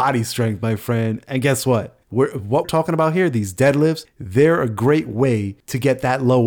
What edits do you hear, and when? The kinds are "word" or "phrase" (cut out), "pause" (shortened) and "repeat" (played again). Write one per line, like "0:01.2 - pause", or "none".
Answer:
0:02.0 - pause
0:02.6 - word